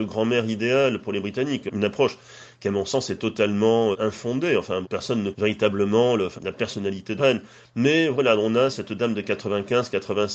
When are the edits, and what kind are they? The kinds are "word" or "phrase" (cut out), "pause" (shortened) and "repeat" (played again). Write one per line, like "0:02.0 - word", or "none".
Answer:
0:03.9 - word
0:04.8 - word
0:05.3 - word
0:06.4 - word
0:07.2 - word
0:08.7 - word